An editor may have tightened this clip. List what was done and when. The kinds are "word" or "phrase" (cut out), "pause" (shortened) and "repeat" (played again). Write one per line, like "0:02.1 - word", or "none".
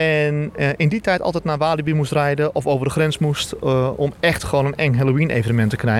none